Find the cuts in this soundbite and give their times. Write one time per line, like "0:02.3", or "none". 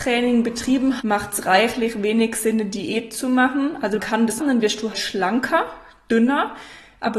0:01.0
0:04.0
0:04.4
0:04.9